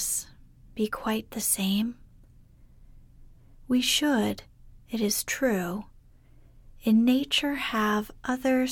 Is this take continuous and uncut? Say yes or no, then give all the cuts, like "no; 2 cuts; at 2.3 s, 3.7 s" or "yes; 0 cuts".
yes; 0 cuts